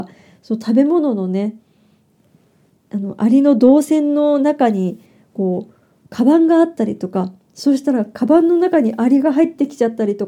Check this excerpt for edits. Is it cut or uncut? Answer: uncut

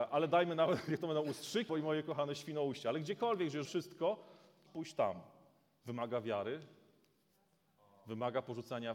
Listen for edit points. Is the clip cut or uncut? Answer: cut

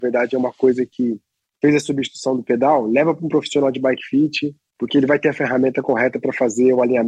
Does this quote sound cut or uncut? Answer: uncut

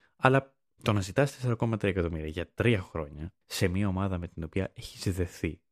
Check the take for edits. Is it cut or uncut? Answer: cut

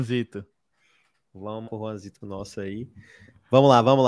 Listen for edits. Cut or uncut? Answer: cut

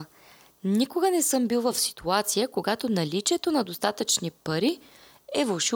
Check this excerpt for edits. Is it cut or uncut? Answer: uncut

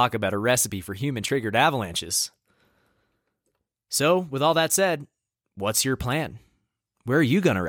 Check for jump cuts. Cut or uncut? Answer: uncut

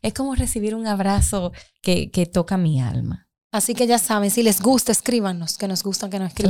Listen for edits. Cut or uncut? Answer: cut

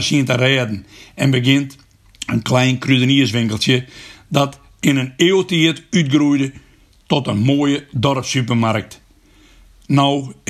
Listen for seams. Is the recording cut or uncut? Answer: uncut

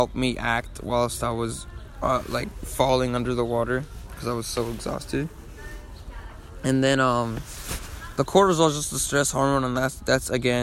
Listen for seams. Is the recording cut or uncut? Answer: uncut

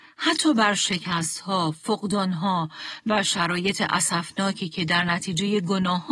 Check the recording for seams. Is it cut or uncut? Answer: uncut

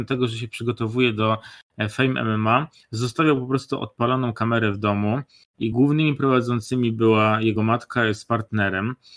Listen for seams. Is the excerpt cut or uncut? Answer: uncut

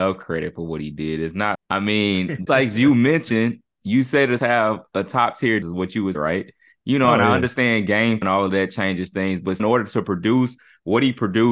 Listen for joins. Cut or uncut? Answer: cut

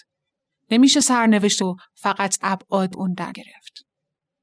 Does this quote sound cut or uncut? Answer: cut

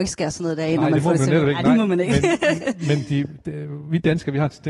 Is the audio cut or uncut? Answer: uncut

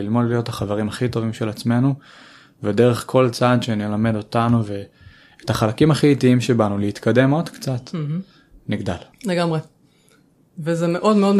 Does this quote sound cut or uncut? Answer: cut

